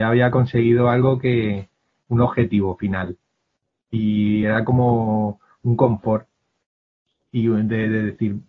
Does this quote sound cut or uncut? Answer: uncut